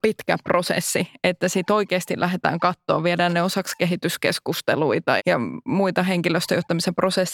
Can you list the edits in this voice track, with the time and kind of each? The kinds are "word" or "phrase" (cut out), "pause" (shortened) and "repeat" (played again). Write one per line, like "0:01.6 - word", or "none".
0:05.2 - word